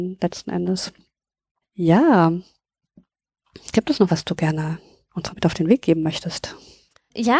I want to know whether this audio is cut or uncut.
cut